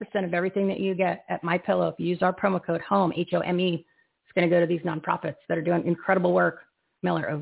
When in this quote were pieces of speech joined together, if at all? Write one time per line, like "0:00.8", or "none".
none